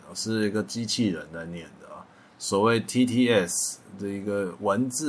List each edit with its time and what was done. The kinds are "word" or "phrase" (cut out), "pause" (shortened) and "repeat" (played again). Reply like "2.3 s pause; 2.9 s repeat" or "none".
none